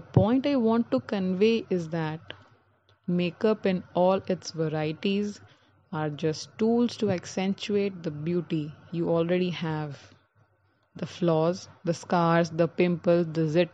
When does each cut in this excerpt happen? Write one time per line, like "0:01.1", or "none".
none

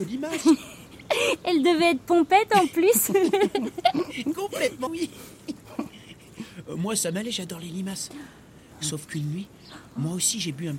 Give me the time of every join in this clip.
0:04.9

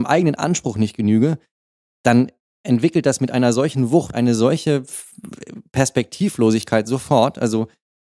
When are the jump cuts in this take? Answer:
0:04.1

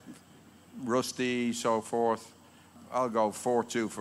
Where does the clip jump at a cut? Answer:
none

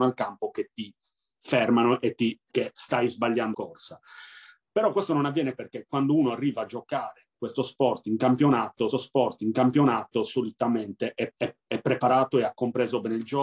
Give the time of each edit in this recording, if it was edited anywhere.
0:02.5
0:03.5
0:05.6
0:08.9
0:11.3

